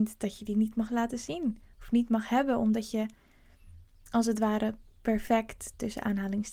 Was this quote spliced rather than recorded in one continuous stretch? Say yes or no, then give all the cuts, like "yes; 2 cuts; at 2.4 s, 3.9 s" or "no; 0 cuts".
no; 0 cuts